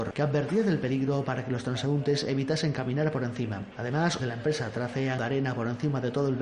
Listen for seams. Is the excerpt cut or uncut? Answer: cut